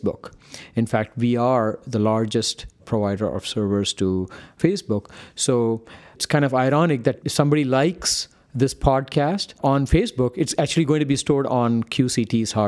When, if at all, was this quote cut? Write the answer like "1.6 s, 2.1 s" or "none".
none